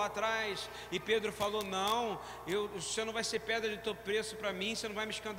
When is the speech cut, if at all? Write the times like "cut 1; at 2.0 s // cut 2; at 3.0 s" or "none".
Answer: none